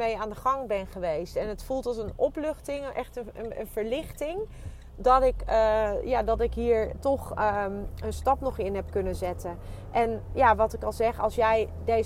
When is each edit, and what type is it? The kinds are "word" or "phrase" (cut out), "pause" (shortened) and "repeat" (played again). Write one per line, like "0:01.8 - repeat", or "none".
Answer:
none